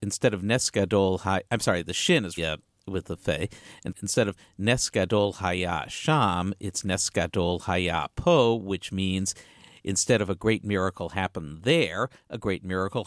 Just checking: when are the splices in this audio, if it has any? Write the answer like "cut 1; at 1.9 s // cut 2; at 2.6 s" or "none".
cut 1; at 1.5 s // cut 2; at 2.4 s // cut 3; at 3.9 s